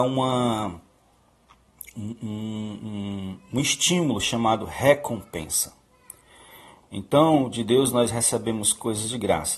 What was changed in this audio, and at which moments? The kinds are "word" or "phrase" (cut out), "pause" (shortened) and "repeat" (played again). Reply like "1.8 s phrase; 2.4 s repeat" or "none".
none